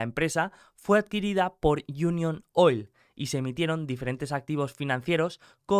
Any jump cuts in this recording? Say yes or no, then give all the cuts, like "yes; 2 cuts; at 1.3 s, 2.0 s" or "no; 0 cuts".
no; 0 cuts